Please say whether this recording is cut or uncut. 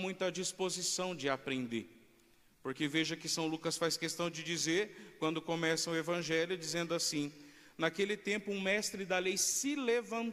uncut